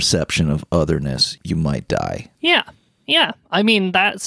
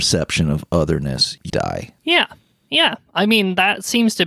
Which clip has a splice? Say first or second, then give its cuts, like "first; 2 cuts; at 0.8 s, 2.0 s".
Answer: second; 1 cut; at 1.5 s